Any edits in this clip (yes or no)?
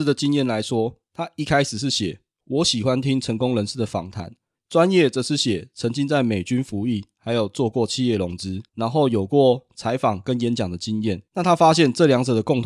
yes